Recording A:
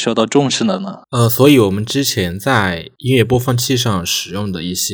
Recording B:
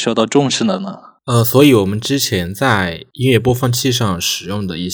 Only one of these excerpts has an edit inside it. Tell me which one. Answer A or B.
A